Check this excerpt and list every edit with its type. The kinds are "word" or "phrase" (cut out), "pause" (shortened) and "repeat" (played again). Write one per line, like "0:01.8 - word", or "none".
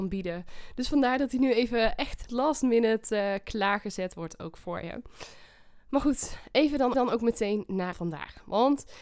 0:02.3 - word
0:06.9 - repeat
0:07.9 - phrase

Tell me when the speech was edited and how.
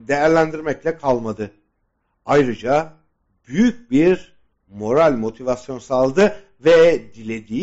none

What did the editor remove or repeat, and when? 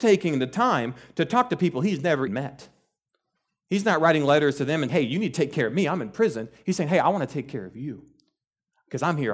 0:02.3 - word
0:04.9 - word

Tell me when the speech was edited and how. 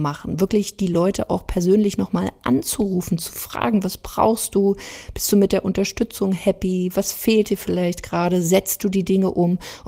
none

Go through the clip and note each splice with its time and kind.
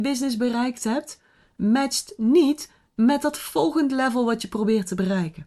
none

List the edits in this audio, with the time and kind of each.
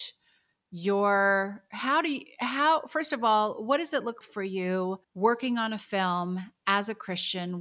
0:04.2 - word
0:05.0 - pause

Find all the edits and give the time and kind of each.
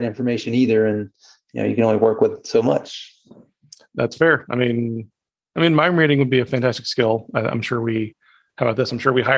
none

